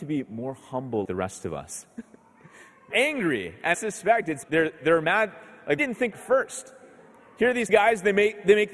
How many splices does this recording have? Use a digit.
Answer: 8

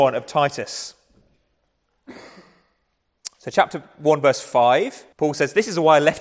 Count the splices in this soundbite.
1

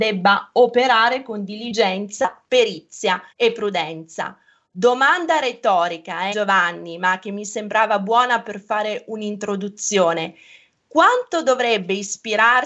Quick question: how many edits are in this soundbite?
2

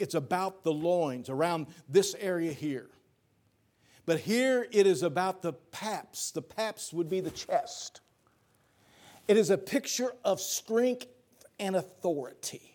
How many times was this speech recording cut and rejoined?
0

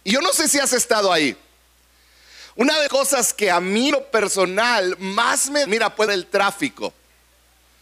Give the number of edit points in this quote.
4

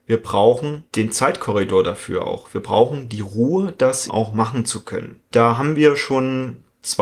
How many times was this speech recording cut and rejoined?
1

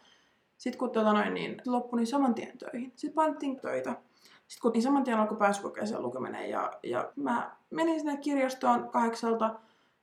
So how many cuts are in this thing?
4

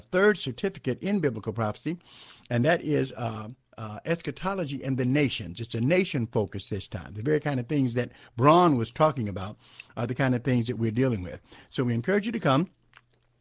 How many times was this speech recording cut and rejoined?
0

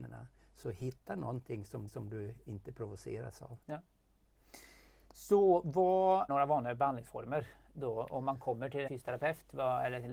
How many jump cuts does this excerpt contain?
4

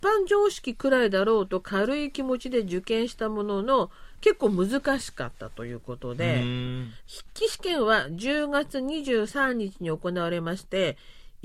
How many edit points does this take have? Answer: 1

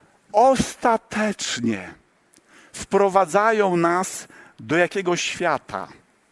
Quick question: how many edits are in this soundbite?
0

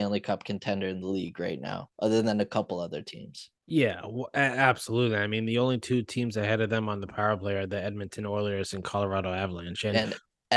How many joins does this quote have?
0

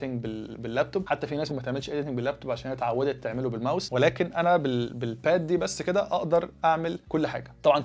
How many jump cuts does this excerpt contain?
1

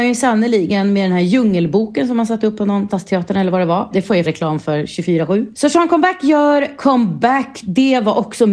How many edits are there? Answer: 2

